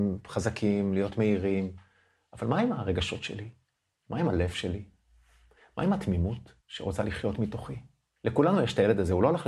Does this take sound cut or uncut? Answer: cut